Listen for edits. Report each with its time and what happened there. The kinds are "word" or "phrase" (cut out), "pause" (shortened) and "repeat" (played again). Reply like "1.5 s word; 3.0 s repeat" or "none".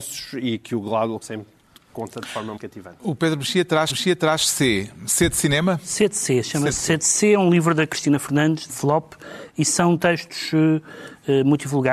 1.2 s word; 2.6 s word; 3.9 s repeat; 8.7 s word